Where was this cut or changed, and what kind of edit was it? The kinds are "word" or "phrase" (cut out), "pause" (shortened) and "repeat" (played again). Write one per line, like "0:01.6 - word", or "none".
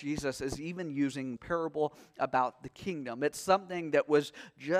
0:01.4 - word